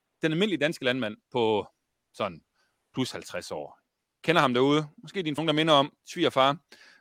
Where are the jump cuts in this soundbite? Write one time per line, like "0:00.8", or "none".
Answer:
0:05.4